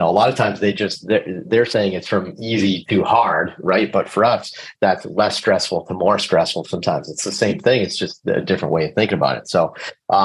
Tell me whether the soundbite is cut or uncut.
uncut